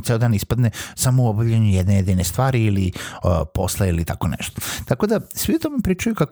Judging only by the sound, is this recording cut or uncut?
uncut